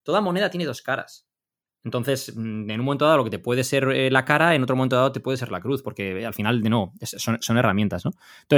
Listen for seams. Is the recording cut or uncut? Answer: uncut